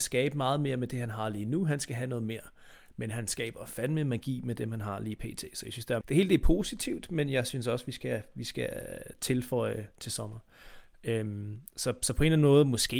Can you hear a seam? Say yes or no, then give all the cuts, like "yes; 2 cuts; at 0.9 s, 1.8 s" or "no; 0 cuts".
yes; 1 cut; at 6.0 s